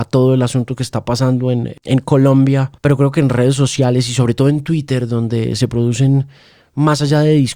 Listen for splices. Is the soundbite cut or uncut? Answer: cut